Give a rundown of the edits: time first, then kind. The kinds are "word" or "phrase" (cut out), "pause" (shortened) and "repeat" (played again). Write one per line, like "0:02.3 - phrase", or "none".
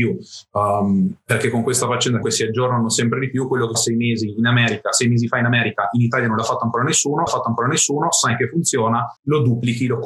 0:02.2 - word
0:03.7 - word
0:07.3 - repeat
0:09.2 - pause